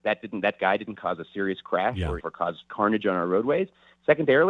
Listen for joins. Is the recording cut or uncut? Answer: cut